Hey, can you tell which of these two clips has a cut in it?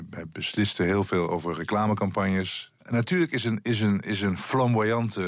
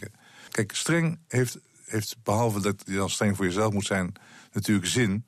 first; 1 cut; at 2.8 s

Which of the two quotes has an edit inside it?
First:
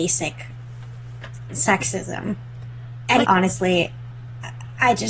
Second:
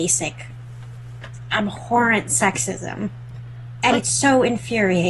first; 2 cuts; at 1.5 s, 3.2 s

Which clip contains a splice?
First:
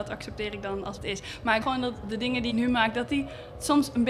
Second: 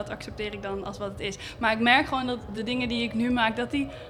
first; 3 cuts; at 1.0 s, 1.6 s, 2.5 s

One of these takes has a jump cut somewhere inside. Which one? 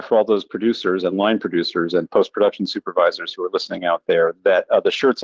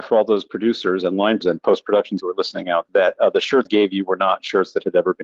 second; 4 cuts; at 1.4 s, 2.2 s, 2.9 s, 3.7 s

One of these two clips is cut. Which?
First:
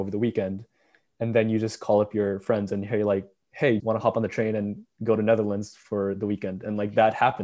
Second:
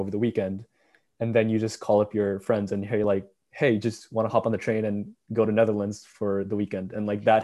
first; 1 cut; at 3.8 s

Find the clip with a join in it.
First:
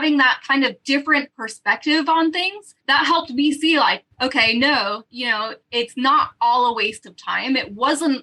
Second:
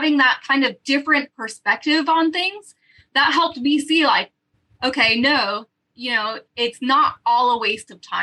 first; 3 cuts; at 2.8 s, 4.1 s, 5.1 s

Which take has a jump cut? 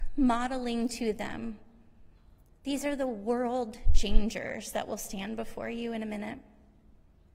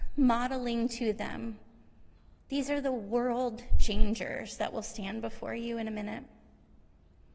second; 1 cut; at 2.4 s

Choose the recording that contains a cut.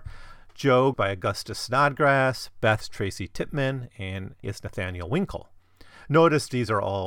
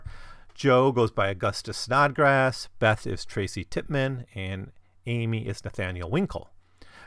first; 3 cuts; at 0.9 s, 2.8 s, 4.4 s

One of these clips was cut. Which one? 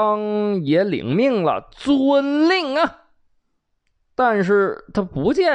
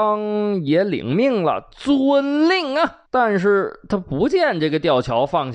second; 1 cut; at 3.1 s

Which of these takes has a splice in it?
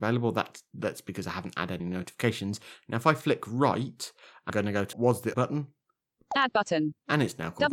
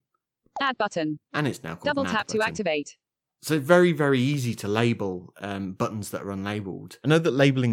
first; 4 cuts; at 1.8 s, 4.5 s, 4.9 s, 5.3 s

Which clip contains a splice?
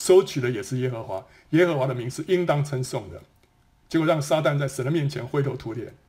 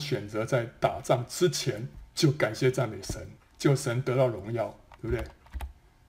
second; 2 cuts; at 2.1 s, 3.4 s

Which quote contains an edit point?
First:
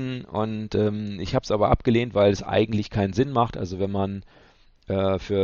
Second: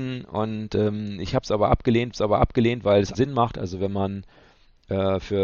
second; 2 cuts; at 2.1 s, 3.1 s

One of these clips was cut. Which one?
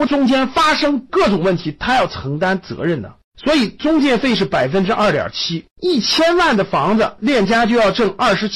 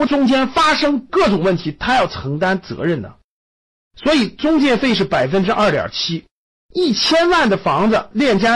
first; 2 cuts; at 3.2 s, 5.7 s

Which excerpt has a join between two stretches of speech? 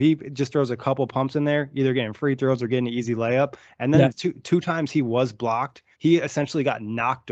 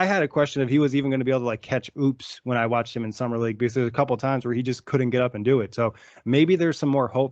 first; 1 cut; at 5.9 s

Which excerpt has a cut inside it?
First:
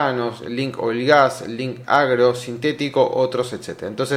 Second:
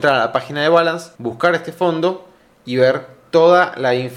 second; 1 cut; at 1.1 s

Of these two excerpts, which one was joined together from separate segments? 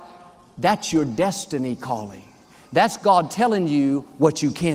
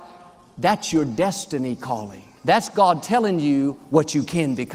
second; 1 cut; at 2.4 s

